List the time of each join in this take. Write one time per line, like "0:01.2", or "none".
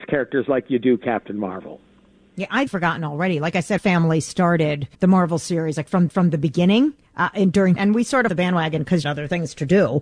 0:02.7
0:03.8
0:04.9
0:06.1
0:07.0
0:07.8
0:08.3
0:09.0